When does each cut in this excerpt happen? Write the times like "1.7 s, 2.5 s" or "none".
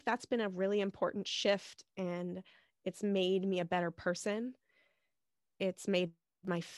none